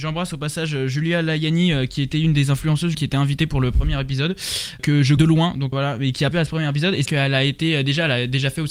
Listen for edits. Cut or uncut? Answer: cut